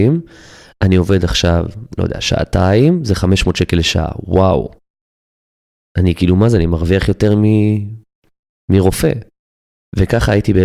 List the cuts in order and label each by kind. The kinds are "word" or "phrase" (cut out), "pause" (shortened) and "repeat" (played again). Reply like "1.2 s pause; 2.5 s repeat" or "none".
none